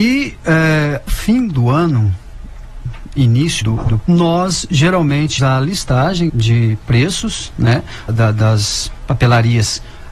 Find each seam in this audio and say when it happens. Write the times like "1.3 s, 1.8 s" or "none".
1.1 s, 3.6 s, 4.0 s, 5.4 s, 6.3 s, 8.1 s